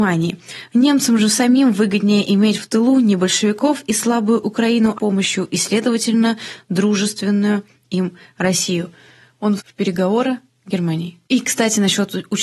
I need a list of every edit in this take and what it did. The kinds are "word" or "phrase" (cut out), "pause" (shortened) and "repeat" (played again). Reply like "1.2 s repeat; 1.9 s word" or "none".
4.9 s phrase; 9.6 s word; 10.5 s word

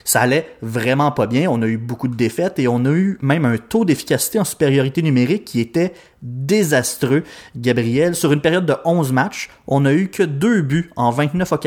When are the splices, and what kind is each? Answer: none

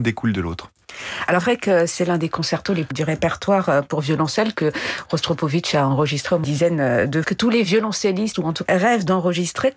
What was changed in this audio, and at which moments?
1.4 s word; 2.9 s word; 6.4 s word; 7.2 s word; 8.3 s word; 8.7 s word

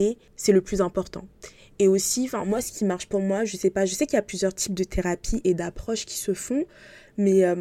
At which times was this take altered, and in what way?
none

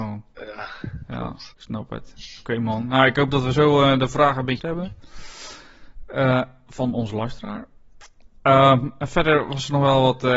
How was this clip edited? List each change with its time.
1.5 s pause; 4.6 s word

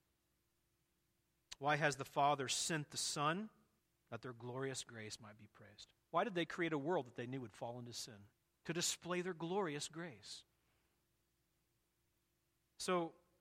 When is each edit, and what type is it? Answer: 3.8 s pause; 6.0 s pause; 8.3 s pause

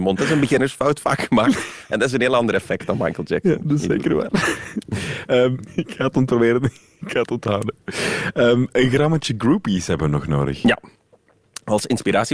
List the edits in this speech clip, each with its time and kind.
5.7 s word

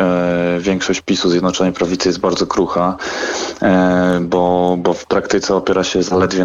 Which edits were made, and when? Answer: none

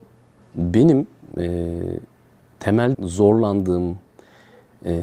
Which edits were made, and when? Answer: 2.9 s word

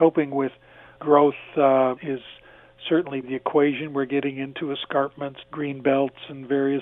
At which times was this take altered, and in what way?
1.0 s word; 2.0 s word; 3.2 s word; 5.4 s word

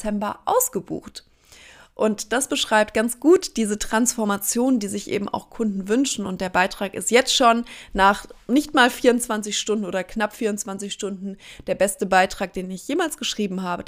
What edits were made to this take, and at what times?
none

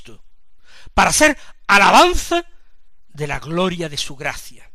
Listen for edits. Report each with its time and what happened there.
none

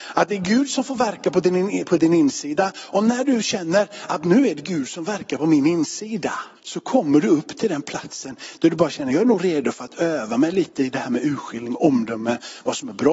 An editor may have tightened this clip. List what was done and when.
6.6 s pause

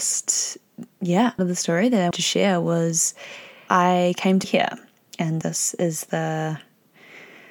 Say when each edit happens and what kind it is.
1.4 s word; 2.1 s word; 3.7 s word; 4.4 s word; 5.4 s word

